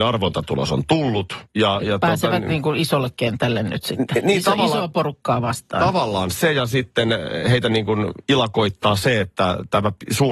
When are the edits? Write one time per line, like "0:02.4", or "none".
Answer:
none